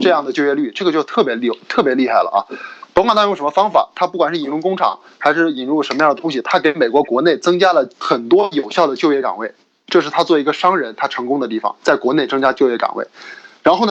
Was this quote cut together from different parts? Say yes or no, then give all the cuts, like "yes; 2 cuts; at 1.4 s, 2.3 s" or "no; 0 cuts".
no; 0 cuts